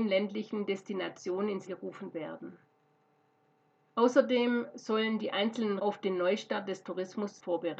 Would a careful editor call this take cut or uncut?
cut